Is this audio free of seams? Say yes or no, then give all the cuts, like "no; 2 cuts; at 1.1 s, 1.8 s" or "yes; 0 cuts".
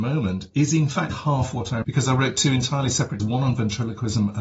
no; 3 cuts; at 1.1 s, 1.8 s, 3.2 s